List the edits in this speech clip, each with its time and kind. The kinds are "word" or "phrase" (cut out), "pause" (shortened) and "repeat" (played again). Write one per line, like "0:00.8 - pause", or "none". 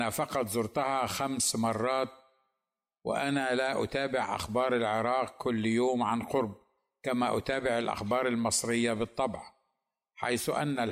none